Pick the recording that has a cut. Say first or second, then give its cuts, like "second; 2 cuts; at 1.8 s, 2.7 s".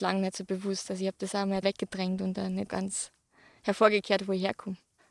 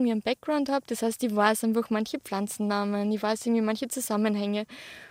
first; 2 cuts; at 1.6 s, 2.7 s